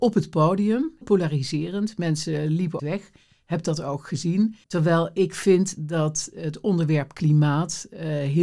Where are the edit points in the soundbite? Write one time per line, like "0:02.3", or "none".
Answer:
0:01.0
0:02.8
0:04.6